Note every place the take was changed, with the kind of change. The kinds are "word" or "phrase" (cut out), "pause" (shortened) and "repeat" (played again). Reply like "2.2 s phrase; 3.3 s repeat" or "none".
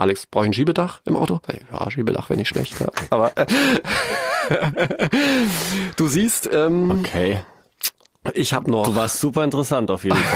1.4 s pause